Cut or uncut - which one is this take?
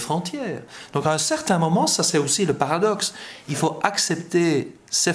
uncut